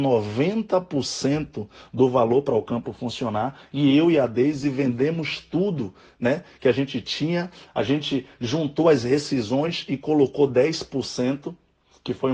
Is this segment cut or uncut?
uncut